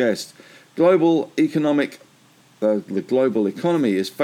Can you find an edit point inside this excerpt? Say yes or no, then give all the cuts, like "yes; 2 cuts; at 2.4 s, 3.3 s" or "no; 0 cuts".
no; 0 cuts